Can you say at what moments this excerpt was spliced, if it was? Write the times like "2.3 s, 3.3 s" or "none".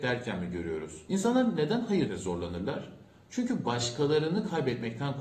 2.1 s